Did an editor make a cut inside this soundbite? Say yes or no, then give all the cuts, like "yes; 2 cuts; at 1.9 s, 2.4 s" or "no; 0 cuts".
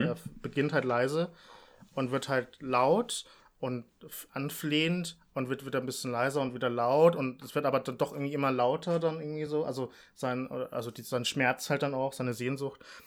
no; 0 cuts